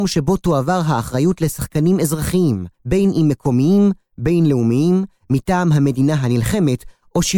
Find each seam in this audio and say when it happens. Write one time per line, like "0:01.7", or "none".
0:02.7